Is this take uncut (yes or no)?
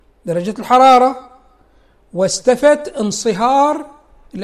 yes